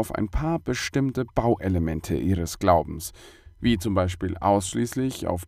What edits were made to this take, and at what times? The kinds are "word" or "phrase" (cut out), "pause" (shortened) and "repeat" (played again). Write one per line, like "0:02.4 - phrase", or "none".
none